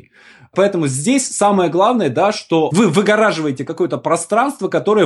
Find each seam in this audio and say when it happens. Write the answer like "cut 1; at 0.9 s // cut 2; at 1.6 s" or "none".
none

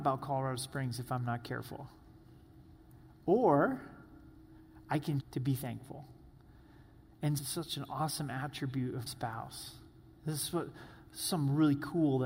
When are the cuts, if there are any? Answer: cut 1; at 5.2 s // cut 2; at 7.4 s // cut 3; at 9.1 s

